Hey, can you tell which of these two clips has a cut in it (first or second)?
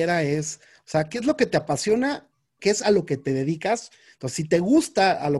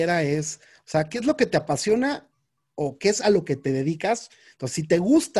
first